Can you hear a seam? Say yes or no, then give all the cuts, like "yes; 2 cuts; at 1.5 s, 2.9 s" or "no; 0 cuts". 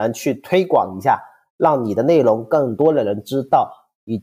no; 0 cuts